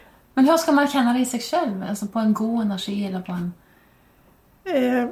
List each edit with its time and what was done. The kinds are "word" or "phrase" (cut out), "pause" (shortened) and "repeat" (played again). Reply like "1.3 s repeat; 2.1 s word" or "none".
none